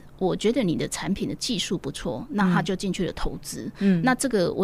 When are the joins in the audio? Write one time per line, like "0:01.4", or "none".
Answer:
none